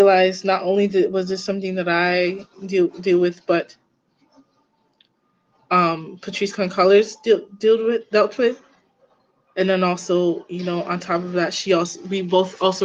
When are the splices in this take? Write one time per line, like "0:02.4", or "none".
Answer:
none